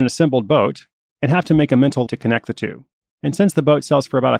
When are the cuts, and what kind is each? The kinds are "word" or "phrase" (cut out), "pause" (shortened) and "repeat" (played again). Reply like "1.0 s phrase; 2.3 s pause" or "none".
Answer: 2.1 s word